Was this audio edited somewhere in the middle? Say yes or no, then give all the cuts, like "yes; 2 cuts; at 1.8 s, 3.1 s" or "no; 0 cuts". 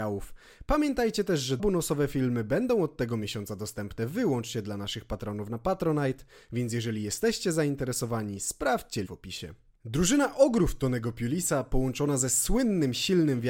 yes; 3 cuts; at 1.6 s, 9.1 s, 9.8 s